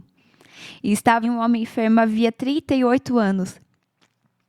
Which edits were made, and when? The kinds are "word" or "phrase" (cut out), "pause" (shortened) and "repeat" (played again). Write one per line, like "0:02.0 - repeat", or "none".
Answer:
0:01.2 - word